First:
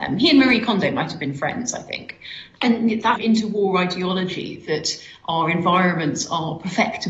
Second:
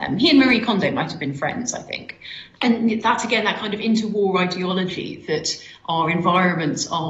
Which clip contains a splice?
first; 1 cut; at 3.2 s

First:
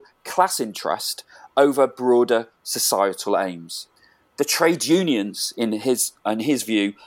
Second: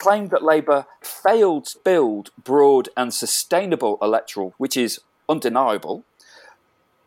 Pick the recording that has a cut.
second; 3 cuts; at 1.0 s, 1.7 s, 4.5 s

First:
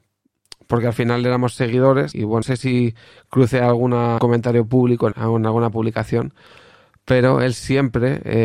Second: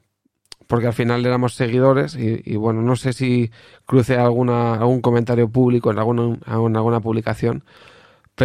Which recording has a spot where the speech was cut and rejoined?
first; 4 cuts; at 2.1 s, 2.4 s, 4.2 s, 5.1 s

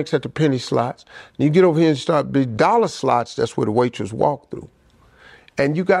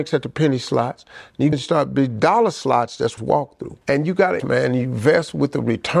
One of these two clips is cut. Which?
second; 4 cuts; at 1.5 s, 3.2 s, 3.8 s, 4.4 s

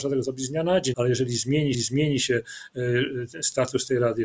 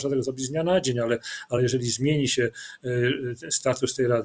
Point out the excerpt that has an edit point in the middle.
first; 2 cuts; at 0.9 s, 1.7 s

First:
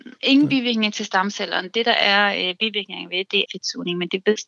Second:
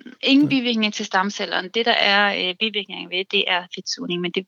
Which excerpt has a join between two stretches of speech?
first; 1 cut; at 3.5 s

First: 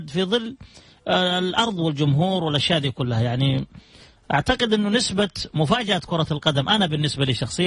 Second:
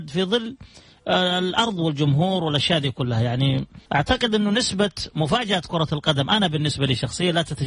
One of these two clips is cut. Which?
second; 1 cut; at 3.9 s

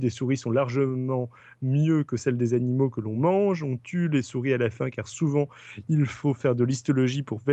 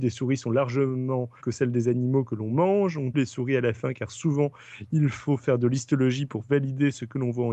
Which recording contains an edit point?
second; 2 cuts; at 1.4 s, 3.1 s

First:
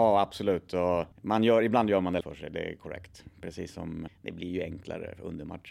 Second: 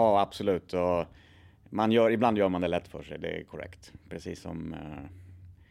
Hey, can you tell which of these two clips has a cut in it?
first; 3 cuts; at 1.1 s, 2.2 s, 4.1 s

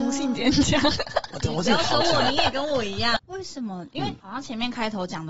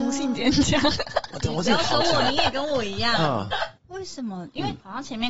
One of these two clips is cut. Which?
first; 1 cut; at 3.2 s

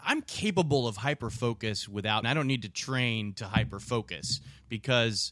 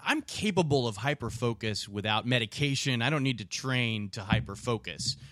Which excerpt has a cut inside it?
first; 1 cut; at 2.2 s

